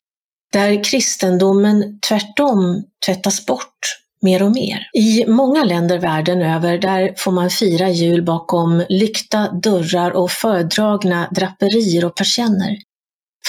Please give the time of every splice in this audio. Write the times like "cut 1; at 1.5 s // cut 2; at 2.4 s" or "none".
cut 1; at 4.9 s